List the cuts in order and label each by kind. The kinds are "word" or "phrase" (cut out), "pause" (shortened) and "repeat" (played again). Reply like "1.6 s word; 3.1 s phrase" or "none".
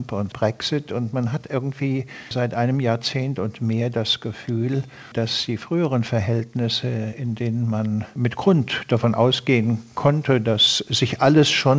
none